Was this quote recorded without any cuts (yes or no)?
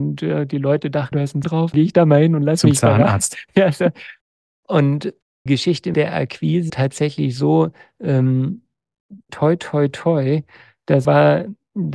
no